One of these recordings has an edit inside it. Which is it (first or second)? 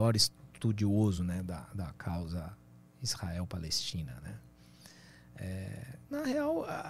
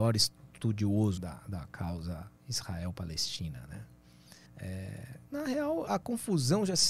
second